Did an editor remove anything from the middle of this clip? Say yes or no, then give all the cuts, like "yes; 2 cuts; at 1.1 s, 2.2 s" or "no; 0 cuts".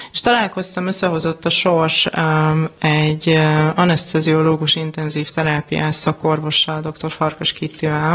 no; 0 cuts